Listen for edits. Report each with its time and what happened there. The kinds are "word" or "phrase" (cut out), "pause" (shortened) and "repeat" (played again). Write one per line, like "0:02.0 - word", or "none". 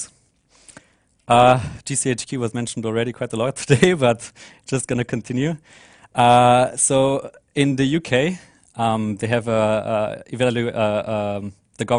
none

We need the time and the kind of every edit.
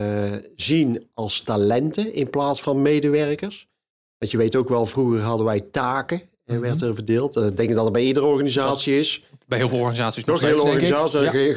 none

